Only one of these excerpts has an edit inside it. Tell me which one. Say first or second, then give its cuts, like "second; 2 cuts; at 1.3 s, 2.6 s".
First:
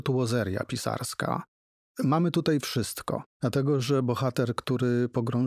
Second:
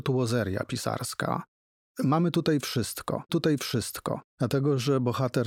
second; 1 cut; at 3.3 s